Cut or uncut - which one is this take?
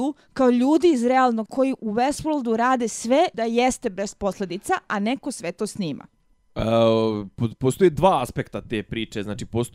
cut